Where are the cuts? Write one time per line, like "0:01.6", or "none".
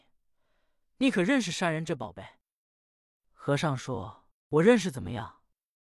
none